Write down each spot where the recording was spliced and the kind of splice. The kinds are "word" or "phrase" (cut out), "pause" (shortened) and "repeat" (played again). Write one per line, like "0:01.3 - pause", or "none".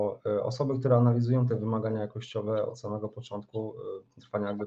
none